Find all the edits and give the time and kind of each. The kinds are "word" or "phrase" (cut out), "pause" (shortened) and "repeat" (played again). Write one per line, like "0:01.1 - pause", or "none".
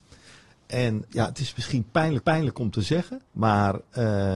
0:01.1 - word
0:02.2 - repeat
0:03.3 - pause

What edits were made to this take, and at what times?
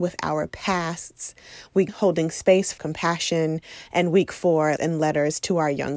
0:01.9 - word
0:02.8 - word
0:04.8 - word

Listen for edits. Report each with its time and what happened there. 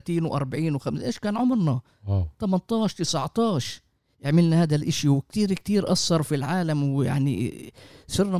none

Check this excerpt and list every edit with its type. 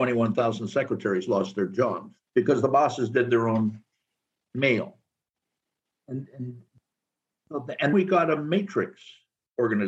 0:02.3 - pause
0:07.9 - word

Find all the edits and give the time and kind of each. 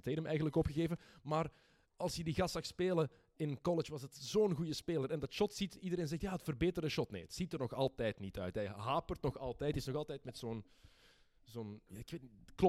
none

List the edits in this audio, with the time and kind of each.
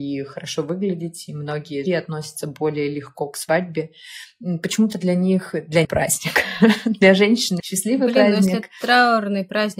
0:01.9 - word
0:05.8 - phrase
0:07.6 - word

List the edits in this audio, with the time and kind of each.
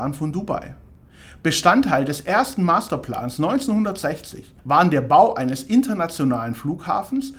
0:04.6 - pause

